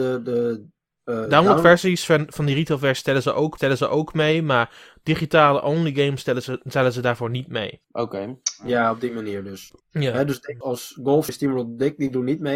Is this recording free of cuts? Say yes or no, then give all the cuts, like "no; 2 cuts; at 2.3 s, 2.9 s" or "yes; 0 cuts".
no; 6 cuts; at 1.3 s, 3.6 s, 7.8 s, 9.8 s, 10.6 s, 11.3 s